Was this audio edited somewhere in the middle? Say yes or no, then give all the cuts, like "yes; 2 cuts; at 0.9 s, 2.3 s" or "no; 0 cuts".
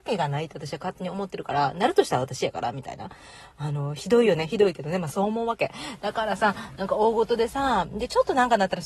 no; 0 cuts